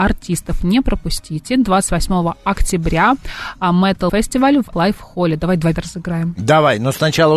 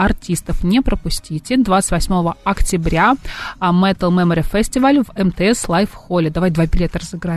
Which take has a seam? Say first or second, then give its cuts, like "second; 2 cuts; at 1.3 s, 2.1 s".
first; 3 cuts; at 4.1 s, 4.7 s, 5.7 s